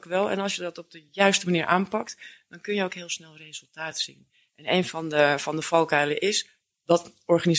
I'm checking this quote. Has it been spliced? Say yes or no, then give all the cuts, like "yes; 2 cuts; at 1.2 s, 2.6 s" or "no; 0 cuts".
no; 0 cuts